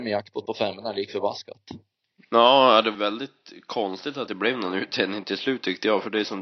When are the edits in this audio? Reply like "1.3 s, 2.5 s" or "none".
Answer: 2.9 s, 4.3 s